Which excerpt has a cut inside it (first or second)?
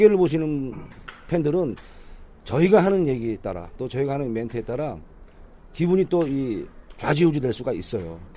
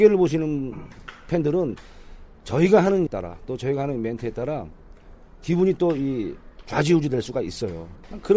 second